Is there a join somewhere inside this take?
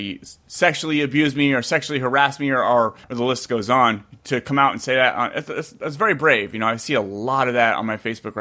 yes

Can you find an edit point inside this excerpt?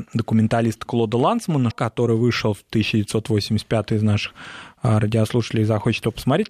yes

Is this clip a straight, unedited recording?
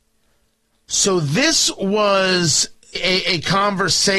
no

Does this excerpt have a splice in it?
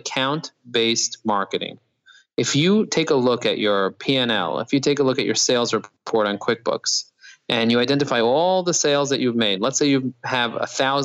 no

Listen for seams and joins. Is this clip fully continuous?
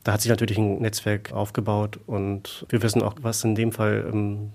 no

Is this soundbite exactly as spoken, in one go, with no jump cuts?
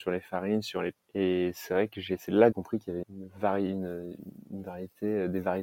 no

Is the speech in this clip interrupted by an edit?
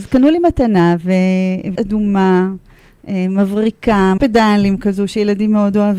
yes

